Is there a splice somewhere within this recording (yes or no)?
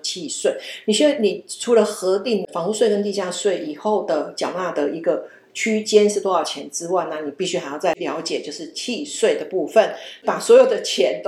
no